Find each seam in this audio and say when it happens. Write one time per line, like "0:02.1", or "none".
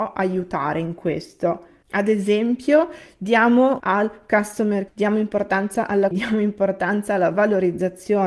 0:03.8
0:04.9
0:06.1